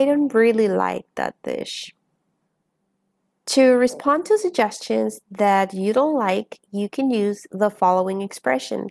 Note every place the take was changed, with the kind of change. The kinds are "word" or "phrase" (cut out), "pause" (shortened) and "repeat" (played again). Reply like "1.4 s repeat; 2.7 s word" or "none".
none